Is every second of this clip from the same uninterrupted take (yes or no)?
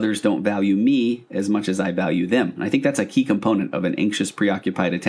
yes